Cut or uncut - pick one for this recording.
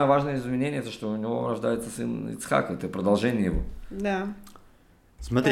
uncut